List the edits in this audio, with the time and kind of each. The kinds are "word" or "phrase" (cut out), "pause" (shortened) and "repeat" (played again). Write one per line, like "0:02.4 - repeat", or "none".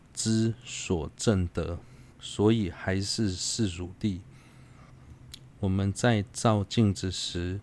0:02.1 - pause